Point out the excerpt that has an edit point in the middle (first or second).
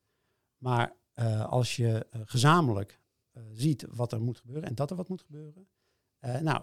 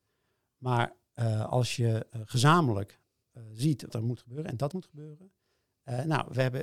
second